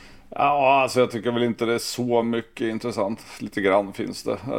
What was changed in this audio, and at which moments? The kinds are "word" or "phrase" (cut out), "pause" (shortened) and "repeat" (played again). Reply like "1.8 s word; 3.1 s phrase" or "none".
none